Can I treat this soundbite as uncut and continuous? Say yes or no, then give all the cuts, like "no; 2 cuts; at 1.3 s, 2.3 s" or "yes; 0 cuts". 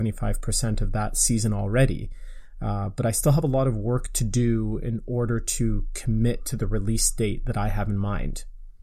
yes; 0 cuts